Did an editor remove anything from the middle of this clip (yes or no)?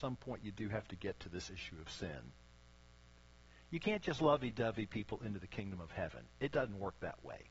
no